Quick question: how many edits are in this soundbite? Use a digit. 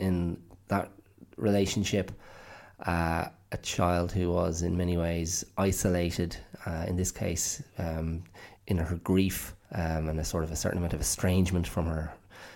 2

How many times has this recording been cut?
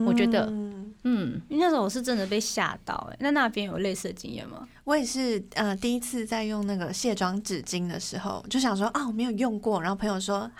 0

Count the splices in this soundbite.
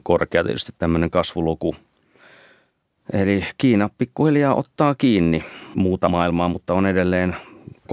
0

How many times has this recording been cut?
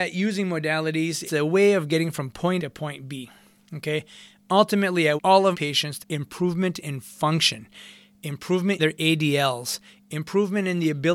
6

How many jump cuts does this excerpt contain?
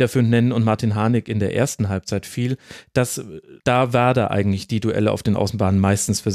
1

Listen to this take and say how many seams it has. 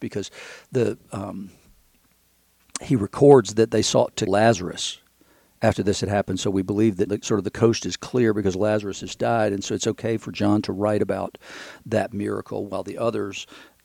2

